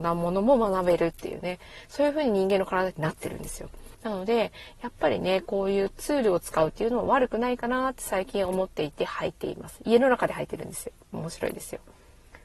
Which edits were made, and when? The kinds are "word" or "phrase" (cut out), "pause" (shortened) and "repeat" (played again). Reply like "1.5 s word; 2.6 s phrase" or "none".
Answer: 3.9 s pause